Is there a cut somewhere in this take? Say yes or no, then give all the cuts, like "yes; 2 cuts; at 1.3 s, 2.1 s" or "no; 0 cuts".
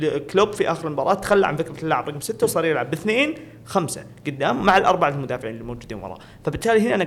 no; 0 cuts